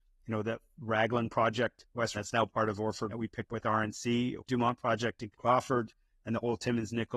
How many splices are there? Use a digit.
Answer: 5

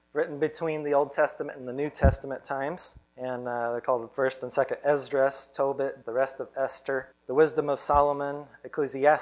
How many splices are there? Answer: 3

